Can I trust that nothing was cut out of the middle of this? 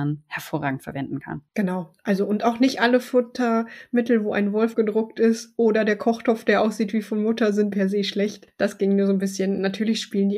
no; 2 cuts; at 4.7 s, 7.7 s

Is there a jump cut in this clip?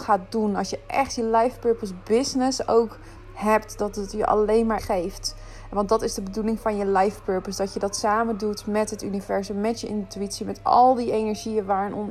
yes; 1 cut; at 4.8 s

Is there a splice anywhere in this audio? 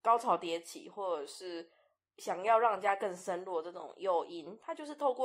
no; 0 cuts

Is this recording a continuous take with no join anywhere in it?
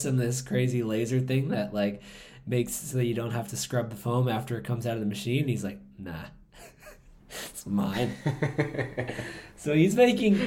yes; 0 cuts

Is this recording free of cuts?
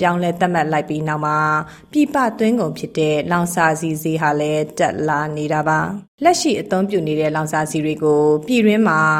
no; 1 cut; at 6.1 s

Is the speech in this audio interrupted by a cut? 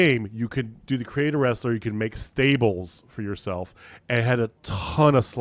no; 0 cuts

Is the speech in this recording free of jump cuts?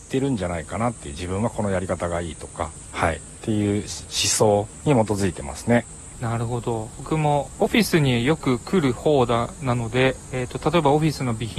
yes; 0 cuts

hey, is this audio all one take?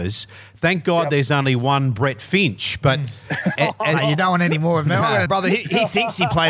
no; 2 cuts; at 3.5 s, 5.3 s

